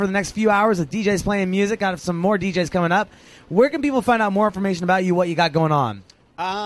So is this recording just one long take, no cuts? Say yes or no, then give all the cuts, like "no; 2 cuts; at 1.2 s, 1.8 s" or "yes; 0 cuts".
yes; 0 cuts